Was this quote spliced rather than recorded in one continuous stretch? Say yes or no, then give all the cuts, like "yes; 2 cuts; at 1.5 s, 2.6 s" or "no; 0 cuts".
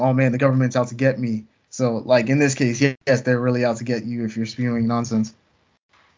no; 0 cuts